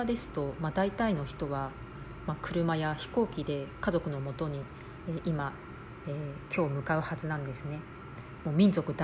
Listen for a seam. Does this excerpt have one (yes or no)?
no